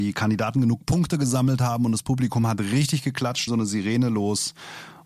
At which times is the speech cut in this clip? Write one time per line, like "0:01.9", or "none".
0:03.5